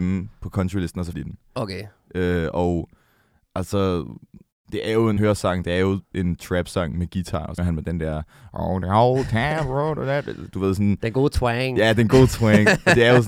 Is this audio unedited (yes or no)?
no